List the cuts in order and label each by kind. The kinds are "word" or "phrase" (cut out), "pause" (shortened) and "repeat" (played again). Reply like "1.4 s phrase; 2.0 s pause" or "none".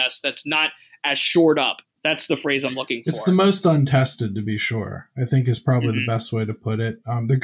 none